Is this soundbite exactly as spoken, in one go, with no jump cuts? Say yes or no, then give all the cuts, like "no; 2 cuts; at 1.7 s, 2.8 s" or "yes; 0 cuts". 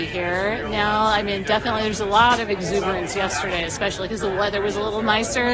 yes; 0 cuts